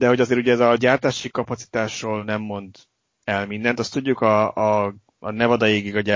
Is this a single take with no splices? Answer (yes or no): yes